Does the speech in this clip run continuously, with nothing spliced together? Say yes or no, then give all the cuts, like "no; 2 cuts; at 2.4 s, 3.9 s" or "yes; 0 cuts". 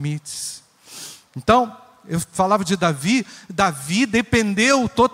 yes; 0 cuts